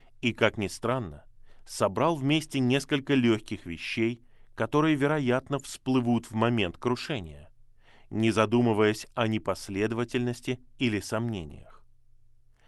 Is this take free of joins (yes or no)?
yes